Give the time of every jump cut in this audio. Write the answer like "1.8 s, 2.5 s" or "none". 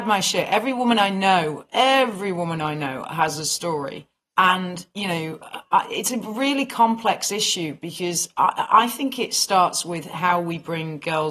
4.1 s